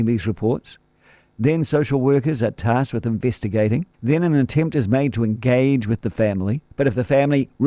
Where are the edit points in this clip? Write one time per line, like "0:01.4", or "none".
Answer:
0:03.9
0:06.7